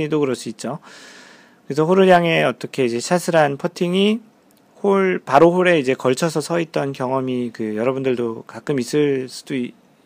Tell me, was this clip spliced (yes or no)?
no